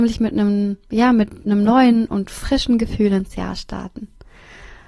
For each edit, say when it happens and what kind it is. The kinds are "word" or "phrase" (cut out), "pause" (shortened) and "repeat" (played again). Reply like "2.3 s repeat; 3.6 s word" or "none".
none